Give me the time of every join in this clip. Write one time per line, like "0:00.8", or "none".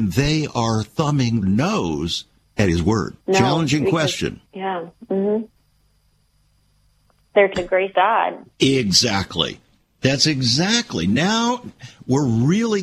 0:01.4
0:02.4
0:03.2
0:04.5
0:07.5
0:07.9
0:08.5